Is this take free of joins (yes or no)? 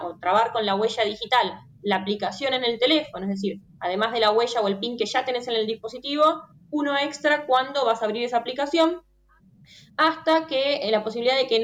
yes